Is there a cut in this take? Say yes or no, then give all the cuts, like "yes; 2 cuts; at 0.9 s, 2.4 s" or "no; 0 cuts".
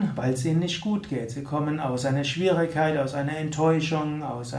no; 0 cuts